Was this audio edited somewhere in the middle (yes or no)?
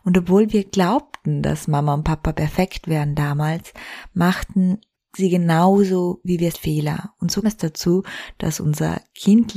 yes